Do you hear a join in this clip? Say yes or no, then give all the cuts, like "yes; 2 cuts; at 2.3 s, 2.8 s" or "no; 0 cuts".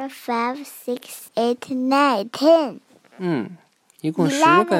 yes; 1 cut; at 1.3 s